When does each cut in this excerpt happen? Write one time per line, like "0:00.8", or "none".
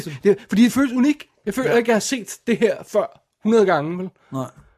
none